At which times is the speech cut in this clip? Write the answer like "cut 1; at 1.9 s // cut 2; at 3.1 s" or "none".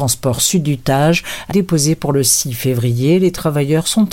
cut 1; at 1.5 s